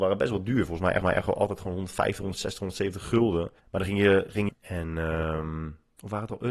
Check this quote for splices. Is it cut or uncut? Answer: cut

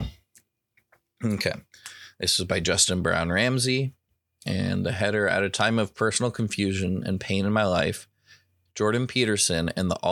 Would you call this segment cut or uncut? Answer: uncut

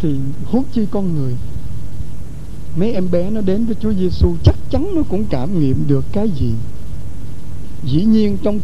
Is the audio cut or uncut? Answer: uncut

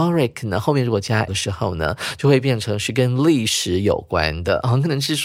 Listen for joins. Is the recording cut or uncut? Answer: cut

